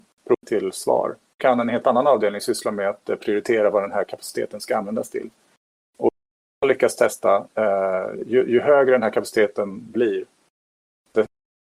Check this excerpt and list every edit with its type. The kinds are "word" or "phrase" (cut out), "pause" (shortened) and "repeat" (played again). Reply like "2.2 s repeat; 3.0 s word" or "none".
none